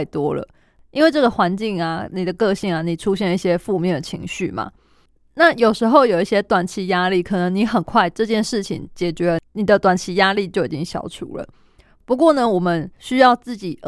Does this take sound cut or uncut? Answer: uncut